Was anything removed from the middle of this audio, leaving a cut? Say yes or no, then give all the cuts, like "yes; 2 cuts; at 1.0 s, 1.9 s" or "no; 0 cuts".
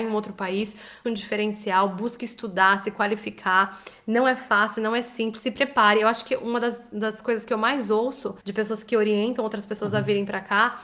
yes; 2 cuts; at 1.0 s, 8.4 s